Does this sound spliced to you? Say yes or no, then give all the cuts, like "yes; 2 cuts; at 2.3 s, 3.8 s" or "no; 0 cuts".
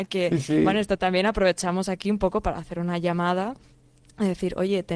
no; 0 cuts